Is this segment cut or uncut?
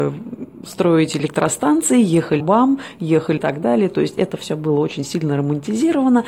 cut